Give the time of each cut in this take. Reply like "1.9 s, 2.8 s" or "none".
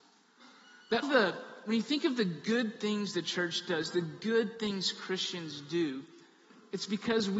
1.0 s